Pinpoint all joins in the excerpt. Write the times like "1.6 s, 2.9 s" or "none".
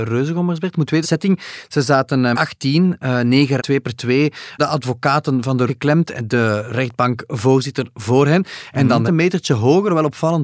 1.0 s, 2.3 s, 3.6 s, 4.6 s, 5.7 s, 9.1 s